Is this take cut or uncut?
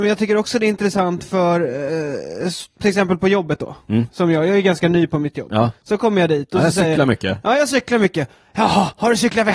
uncut